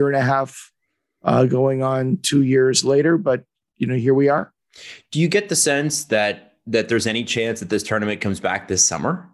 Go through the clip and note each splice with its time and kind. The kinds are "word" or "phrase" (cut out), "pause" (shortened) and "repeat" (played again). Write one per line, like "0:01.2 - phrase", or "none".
none